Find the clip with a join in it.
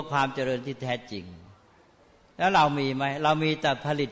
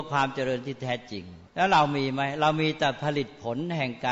second; 1 cut; at 1.5 s

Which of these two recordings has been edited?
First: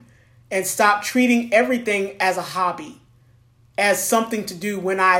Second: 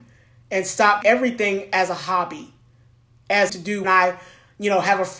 second; 3 cuts; at 1.0 s, 3.5 s, 3.8 s

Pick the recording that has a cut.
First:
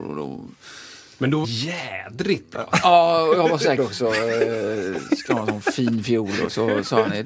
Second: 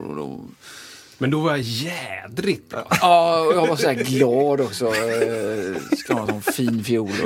first; 2 cuts; at 1.4 s, 3.8 s

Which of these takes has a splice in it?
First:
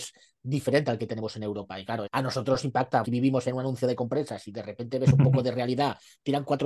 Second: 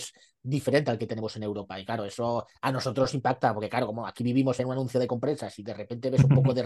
first; 2 cuts; at 2.1 s, 3.0 s

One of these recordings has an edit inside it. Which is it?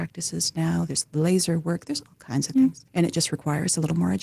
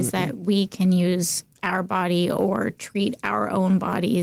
first; 1 cut; at 2.9 s

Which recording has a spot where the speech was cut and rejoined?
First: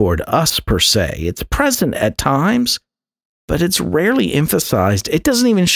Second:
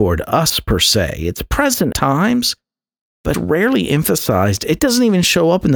second; 2 cuts; at 1.9 s, 3.3 s

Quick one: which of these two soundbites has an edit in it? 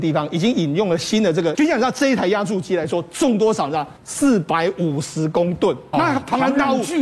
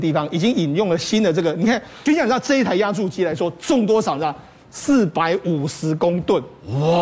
first; 3 cuts; at 1.5 s, 4.0 s, 5.9 s

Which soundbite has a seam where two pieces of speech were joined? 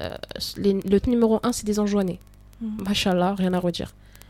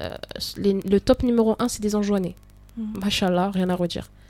first; 1 cut; at 1.0 s

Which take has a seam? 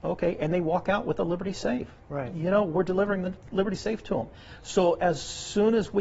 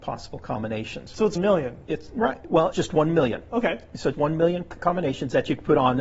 second; 4 cuts; at 1.4 s, 2.7 s, 4.1 s, 4.8 s

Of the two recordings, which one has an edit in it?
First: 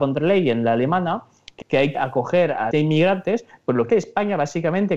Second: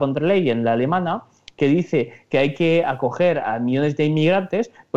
first; 4 cuts; at 1.6 s, 1.9 s, 2.7 s, 3.9 s

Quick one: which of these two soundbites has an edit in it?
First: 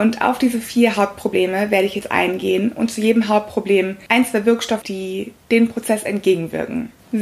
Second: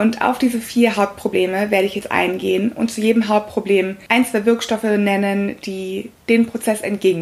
first; 1 cut; at 4.8 s

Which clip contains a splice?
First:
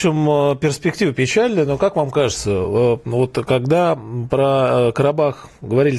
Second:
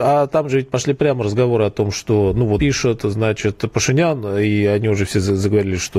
second; 1 cut; at 2.6 s

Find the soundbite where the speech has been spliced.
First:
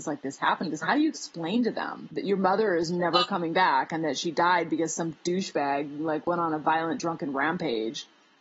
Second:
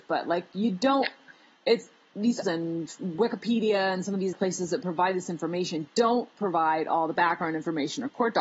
second; 2 cuts; at 2.4 s, 4.3 s

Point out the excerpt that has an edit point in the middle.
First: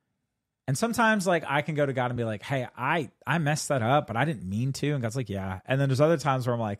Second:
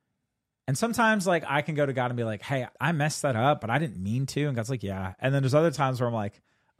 second; 1 cut; at 2.7 s

